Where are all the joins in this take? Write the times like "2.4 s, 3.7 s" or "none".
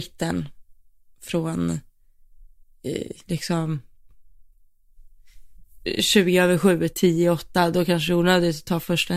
3.2 s, 6.9 s

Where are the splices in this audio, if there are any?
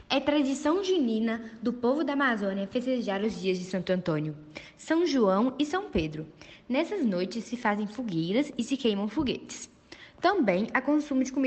none

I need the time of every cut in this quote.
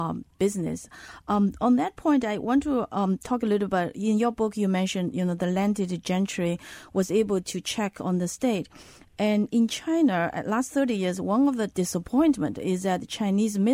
none

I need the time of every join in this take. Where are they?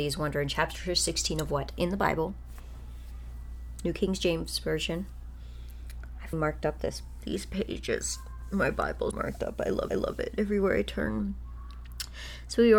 6.3 s, 9.1 s, 9.9 s

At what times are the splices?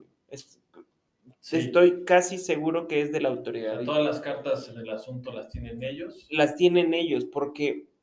none

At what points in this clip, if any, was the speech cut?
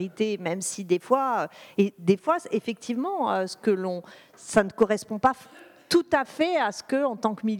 none

